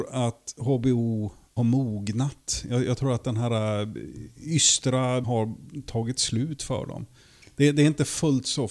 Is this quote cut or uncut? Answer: cut